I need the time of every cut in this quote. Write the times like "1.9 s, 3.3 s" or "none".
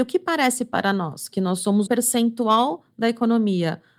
1.9 s

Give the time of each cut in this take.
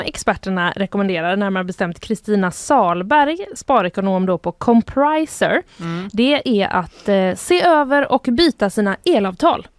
3.6 s

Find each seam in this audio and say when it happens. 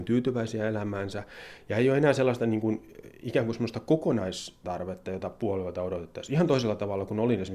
4.6 s

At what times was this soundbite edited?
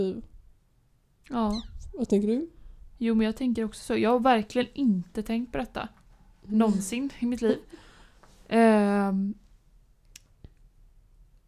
none

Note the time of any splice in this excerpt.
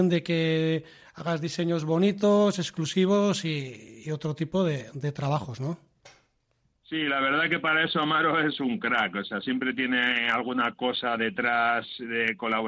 none

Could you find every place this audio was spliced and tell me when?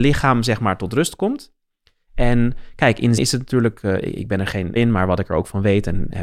3.2 s, 4.8 s

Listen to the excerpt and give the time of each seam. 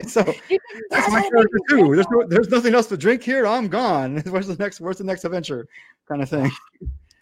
none

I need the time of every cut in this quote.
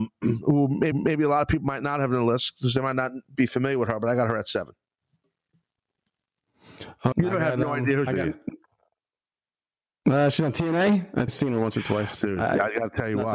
0.9 s, 7.1 s, 8.1 s, 11.3 s

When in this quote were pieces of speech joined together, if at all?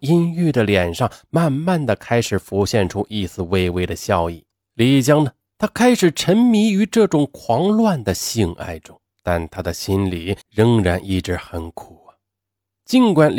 4.5 s, 9.1 s, 10.4 s

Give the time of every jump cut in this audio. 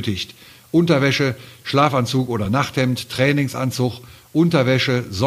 none

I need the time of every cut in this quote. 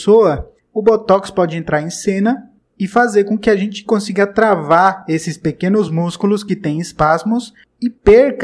none

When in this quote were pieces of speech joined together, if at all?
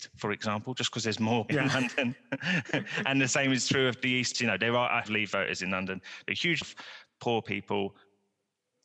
1.5 s, 4.3 s, 5.1 s, 6.6 s

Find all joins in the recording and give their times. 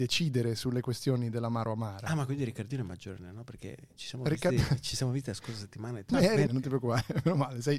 6.1 s, 6.5 s

